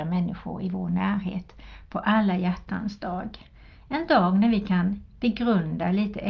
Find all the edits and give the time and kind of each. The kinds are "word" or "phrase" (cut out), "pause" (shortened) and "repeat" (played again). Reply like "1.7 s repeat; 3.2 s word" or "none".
none